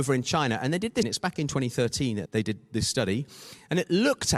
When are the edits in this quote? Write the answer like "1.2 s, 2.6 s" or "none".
1.0 s, 2.3 s